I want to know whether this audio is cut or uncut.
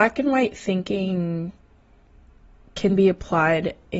uncut